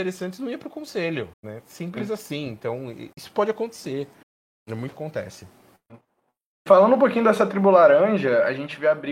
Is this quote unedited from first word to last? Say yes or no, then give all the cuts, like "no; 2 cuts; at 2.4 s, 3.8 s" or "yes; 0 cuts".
no; 4 cuts; at 1.3 s, 3.1 s, 4.2 s, 4.9 s